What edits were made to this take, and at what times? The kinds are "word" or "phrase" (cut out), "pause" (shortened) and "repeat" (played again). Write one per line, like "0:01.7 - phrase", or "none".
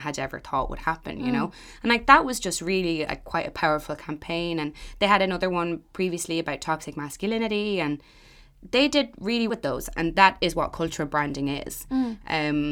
0:09.5 - word